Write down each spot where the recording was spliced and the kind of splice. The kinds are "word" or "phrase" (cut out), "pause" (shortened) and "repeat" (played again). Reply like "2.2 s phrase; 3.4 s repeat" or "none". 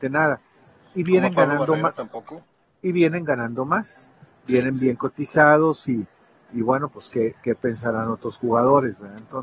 none